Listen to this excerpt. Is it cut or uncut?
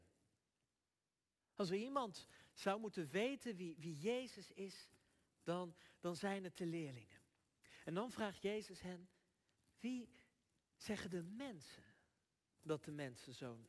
uncut